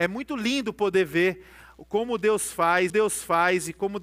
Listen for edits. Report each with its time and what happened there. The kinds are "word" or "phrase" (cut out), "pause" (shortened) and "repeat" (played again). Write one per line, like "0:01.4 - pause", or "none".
0:02.9 - repeat